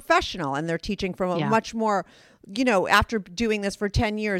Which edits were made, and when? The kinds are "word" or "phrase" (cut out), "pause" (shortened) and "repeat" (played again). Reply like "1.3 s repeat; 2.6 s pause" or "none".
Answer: none